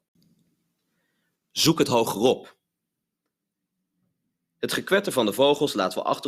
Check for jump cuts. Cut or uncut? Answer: uncut